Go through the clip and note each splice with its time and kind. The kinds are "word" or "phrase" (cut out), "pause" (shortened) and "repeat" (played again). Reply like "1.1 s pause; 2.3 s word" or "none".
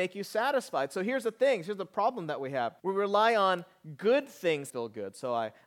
2.8 s pause; 4.7 s phrase

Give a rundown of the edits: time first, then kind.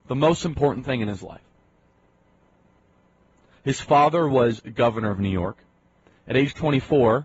none

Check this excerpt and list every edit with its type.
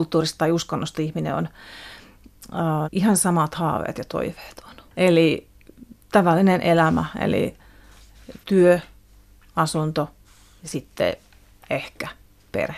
2.8 s word; 4.9 s pause; 8.4 s phrase; 10.2 s pause

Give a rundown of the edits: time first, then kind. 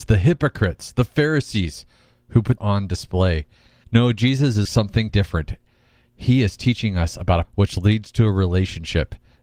2.6 s word; 4.7 s word; 5.1 s word; 7.4 s word

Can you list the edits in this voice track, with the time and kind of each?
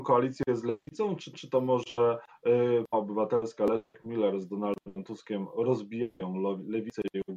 1.3 s repeat; 2.9 s word

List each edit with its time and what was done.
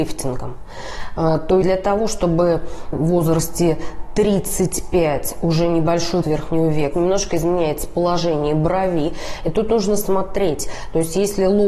1.6 s word; 2.9 s phrase; 6.2 s word; 6.9 s word

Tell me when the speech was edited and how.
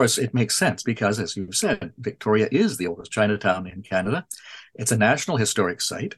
none

